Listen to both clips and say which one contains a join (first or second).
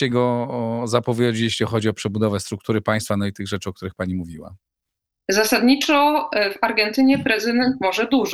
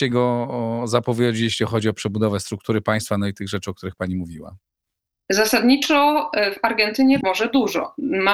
second